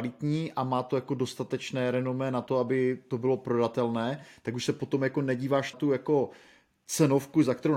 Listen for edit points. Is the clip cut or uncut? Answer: cut